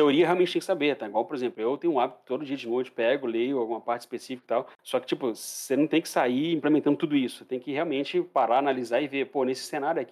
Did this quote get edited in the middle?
yes; 1 cut; at 4.7 s

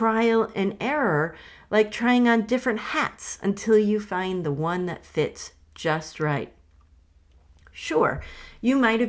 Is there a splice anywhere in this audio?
no; 0 cuts

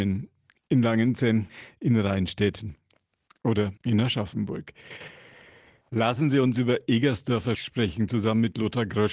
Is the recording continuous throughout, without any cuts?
no; 2 cuts; at 3.8 s, 7.5 s

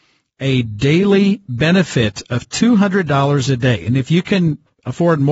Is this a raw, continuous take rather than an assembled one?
yes; 0 cuts

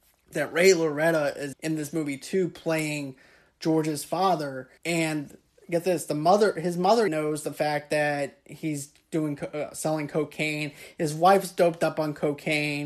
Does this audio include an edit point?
yes; 3 cuts; at 1.5 s, 4.8 s, 7.1 s

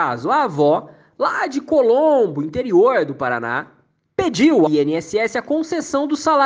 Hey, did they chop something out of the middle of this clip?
yes; 1 cut; at 4.7 s

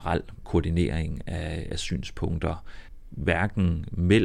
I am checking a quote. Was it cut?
no; 0 cuts

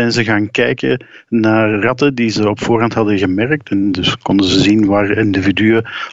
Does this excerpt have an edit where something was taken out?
no; 0 cuts

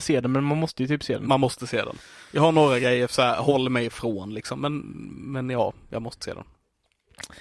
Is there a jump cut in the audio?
no; 0 cuts

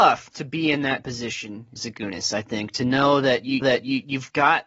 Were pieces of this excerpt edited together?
yes; 2 cuts; at 1.8 s, 3.6 s

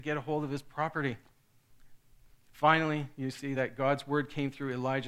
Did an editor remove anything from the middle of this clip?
no; 0 cuts

